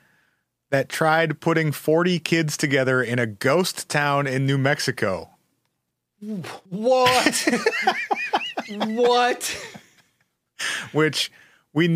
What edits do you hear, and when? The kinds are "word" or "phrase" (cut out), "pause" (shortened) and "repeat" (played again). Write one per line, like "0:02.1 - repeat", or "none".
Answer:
0:06.7 - pause

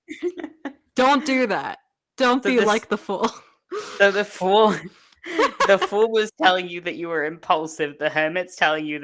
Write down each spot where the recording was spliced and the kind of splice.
none

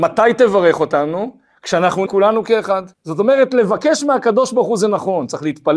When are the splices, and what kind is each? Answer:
0:02.1 - word
0:02.9 - pause

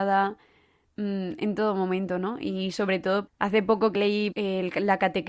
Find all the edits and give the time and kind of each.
0:03.3 - word
0:03.9 - word
0:04.3 - word

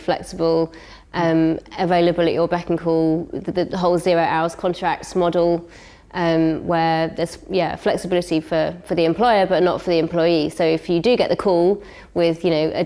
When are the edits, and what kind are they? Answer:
none

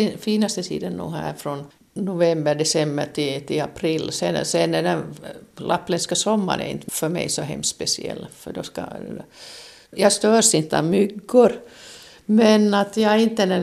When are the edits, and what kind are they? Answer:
none

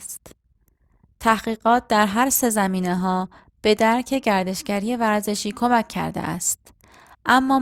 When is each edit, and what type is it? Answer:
none

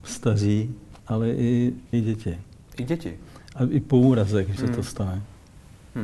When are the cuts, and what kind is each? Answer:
0:01.0 - pause
0:01.9 - word
0:04.6 - word

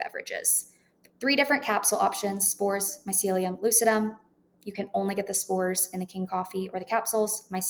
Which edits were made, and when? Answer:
none

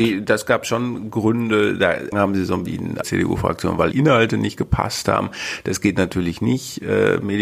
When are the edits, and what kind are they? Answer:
0:02.1 - phrase
0:02.7 - phrase
0:03.0 - phrase
0:03.9 - phrase

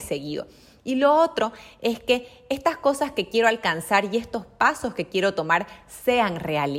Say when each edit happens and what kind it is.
none

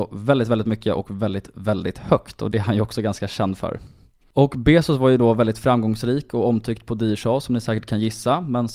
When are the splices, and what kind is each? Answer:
none

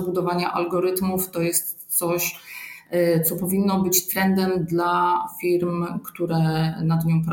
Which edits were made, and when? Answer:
none

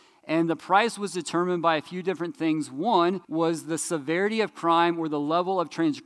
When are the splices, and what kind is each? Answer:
0:03.2 - pause

